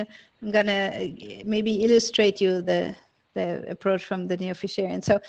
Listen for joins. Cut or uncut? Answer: uncut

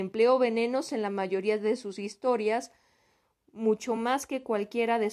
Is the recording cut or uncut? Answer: uncut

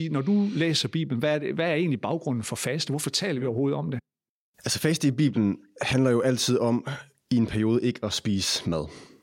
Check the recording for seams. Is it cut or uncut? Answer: uncut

